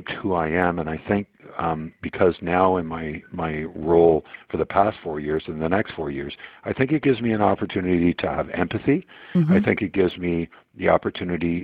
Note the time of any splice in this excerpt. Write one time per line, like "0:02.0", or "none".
none